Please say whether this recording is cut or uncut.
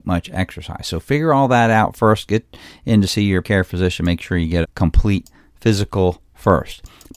cut